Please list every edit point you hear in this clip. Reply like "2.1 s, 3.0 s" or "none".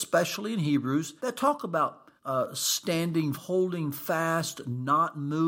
1.2 s, 2.2 s, 3.3 s